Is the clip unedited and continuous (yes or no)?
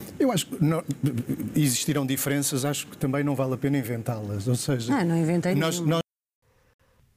yes